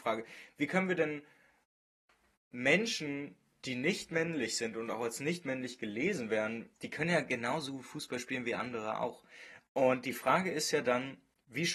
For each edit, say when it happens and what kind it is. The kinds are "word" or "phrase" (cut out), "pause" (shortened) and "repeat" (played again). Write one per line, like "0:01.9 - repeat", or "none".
0:06.8 - pause